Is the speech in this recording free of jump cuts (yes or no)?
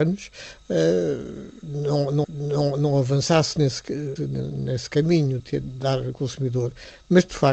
no